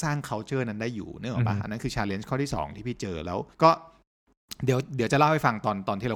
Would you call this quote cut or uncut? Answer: cut